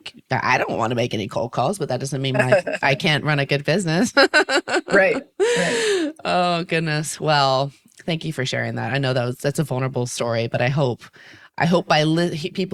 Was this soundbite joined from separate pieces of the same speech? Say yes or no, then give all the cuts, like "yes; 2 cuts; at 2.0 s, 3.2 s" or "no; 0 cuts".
no; 0 cuts